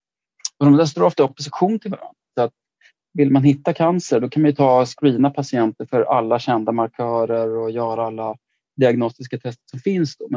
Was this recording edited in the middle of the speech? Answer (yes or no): no